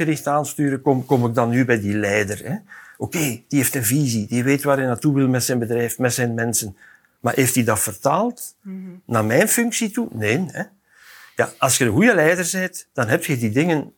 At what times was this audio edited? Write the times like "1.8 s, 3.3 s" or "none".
none